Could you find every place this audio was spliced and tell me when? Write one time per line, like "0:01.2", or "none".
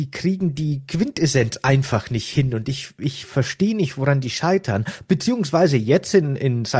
none